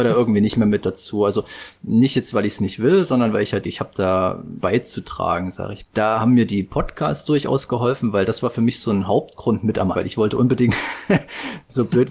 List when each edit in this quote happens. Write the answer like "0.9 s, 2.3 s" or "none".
3.6 s, 4.6 s, 5.8 s, 9.9 s